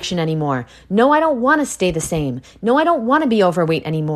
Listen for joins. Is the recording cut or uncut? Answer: uncut